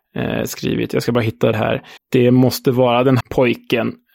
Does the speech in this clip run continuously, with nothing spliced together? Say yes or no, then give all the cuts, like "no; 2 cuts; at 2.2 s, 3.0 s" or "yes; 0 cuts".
no; 3 cuts; at 1.5 s, 2.0 s, 3.2 s